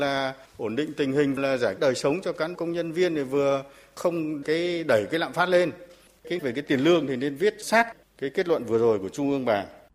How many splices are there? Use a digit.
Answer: 6